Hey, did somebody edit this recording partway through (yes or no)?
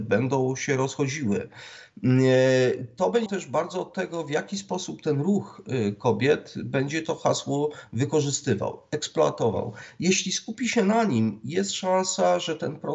yes